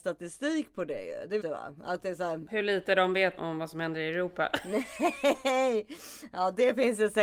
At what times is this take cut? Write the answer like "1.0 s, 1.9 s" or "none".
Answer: 1.4 s, 3.4 s